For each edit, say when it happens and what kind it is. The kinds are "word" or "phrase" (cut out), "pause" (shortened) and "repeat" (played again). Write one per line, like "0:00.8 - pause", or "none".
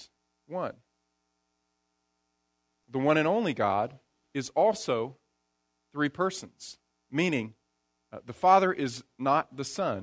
0:04.1 - pause
0:06.9 - pause